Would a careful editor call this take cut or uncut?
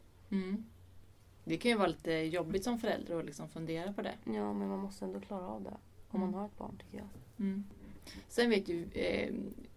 uncut